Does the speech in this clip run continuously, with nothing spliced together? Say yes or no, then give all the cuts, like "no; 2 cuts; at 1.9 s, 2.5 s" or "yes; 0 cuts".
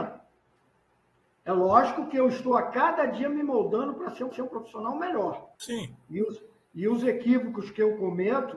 no; 2 cuts; at 4.3 s, 5.5 s